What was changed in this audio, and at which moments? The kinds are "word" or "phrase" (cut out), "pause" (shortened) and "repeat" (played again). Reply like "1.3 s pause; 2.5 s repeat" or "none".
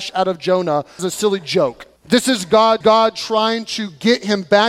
1.0 s phrase; 2.0 s pause; 2.8 s repeat